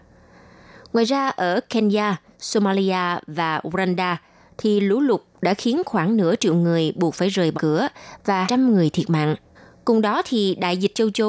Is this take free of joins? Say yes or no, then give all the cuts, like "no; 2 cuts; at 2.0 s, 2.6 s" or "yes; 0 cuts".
no; 3 cuts; at 7.5 s, 8.4 s, 9.5 s